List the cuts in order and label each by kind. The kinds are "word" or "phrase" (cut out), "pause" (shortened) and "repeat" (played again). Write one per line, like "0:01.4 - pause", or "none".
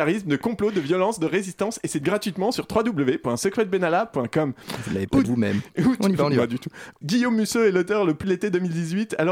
0:02.0 - word
0:05.2 - phrase
0:07.0 - word
0:08.2 - word